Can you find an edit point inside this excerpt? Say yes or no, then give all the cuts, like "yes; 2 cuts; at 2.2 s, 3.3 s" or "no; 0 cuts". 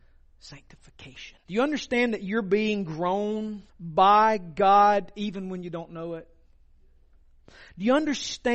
yes; 2 cuts; at 1.4 s, 3.7 s